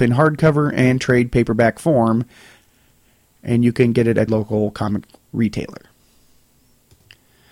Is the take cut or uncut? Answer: cut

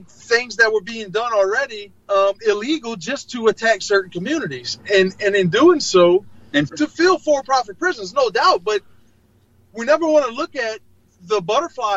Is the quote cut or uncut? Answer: cut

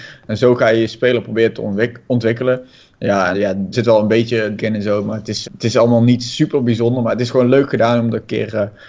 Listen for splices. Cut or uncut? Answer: cut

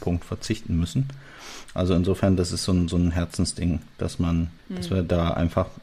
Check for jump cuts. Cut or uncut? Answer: cut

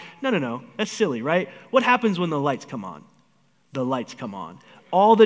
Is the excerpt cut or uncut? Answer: uncut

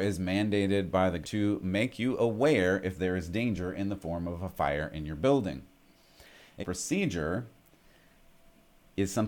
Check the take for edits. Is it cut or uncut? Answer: cut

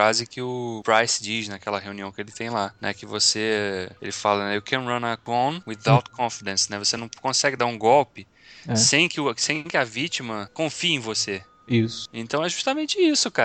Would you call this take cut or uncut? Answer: uncut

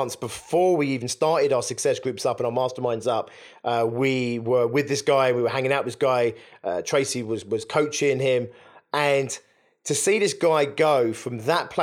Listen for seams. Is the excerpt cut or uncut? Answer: uncut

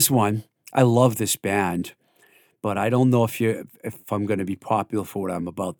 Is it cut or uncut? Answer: uncut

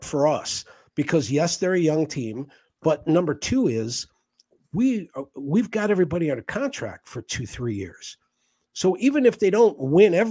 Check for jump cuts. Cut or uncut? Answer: uncut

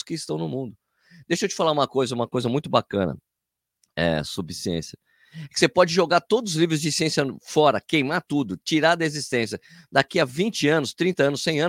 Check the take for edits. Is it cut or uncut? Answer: uncut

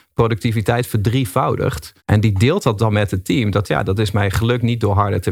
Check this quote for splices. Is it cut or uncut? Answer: cut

